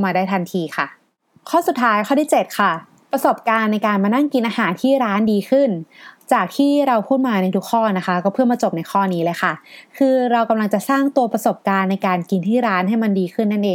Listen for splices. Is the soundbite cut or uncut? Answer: uncut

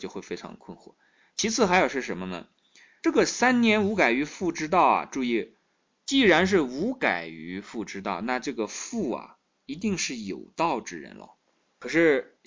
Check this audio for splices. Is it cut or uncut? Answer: uncut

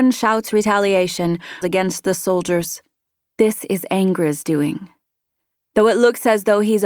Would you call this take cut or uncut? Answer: cut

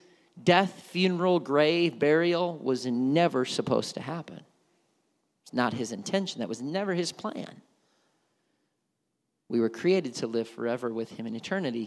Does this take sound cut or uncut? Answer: uncut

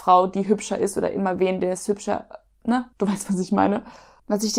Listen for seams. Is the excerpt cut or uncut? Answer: cut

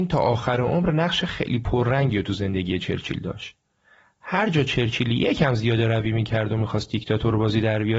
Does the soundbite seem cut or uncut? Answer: uncut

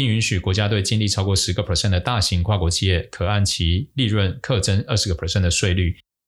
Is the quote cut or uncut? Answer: uncut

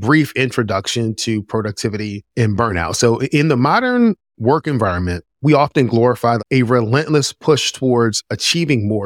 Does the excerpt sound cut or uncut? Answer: cut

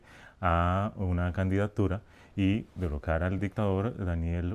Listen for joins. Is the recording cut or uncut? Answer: uncut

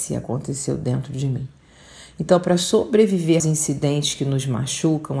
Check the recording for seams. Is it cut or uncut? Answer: cut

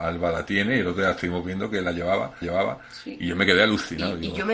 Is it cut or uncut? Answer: cut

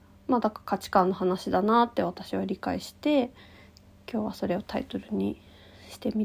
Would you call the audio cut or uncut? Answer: uncut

